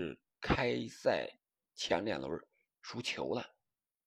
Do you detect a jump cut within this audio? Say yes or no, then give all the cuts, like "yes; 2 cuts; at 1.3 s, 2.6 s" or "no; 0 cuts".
no; 0 cuts